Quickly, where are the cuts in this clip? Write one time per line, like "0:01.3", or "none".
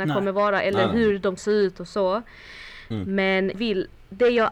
0:01.4
0:03.5